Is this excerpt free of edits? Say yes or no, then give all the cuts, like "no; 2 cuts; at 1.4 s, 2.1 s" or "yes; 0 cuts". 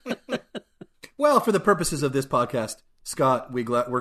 yes; 0 cuts